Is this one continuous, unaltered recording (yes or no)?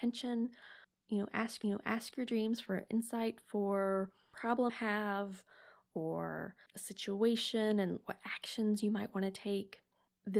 no